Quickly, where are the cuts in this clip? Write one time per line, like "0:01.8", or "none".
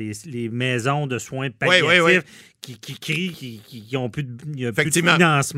none